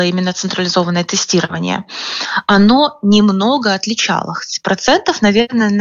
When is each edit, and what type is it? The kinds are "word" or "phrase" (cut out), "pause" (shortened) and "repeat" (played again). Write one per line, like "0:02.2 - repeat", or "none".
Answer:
none